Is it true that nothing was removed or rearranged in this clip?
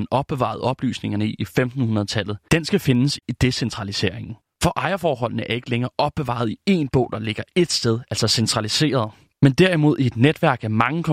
yes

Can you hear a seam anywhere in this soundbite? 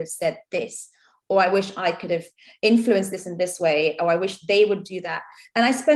no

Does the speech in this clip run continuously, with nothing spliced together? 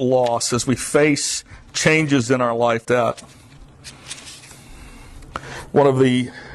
no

